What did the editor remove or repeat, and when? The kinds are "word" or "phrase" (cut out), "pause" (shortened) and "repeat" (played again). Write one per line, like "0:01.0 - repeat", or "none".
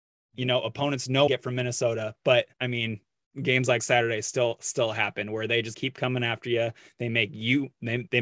0:01.3 - phrase
0:02.5 - pause
0:05.7 - word